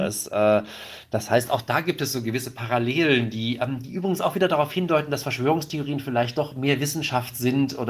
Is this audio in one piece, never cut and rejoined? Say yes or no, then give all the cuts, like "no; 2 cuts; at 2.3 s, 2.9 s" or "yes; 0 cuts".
yes; 0 cuts